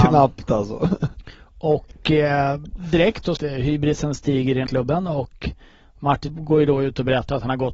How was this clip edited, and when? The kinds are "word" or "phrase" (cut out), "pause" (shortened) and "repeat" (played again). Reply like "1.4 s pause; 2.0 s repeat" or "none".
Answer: 3.4 s phrase; 4.7 s word; 6.3 s word